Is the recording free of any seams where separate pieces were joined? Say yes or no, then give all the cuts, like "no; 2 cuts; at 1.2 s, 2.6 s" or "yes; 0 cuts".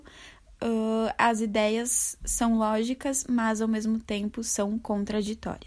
yes; 0 cuts